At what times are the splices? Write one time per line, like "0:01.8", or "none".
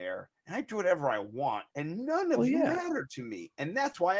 0:01.7